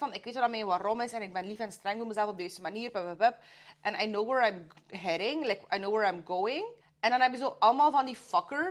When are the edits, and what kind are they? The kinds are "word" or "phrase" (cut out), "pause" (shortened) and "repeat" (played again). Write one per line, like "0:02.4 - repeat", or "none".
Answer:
0:06.8 - pause